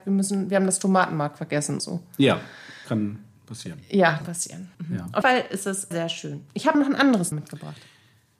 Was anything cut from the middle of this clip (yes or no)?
yes